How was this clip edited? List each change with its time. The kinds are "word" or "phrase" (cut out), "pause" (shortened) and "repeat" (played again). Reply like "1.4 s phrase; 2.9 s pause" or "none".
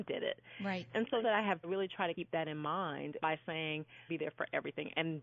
1.2 s word; 1.6 s phrase; 2.1 s word; 3.2 s word; 4.1 s phrase